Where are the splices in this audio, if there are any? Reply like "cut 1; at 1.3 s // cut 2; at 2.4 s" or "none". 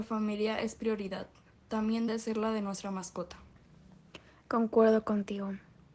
cut 1; at 2.1 s